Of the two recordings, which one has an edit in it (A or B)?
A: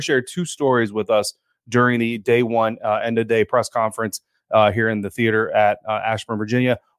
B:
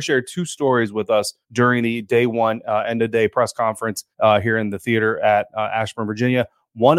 B